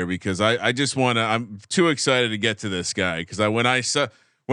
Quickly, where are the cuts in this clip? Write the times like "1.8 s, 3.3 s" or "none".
none